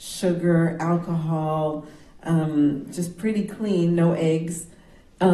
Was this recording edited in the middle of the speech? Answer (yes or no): no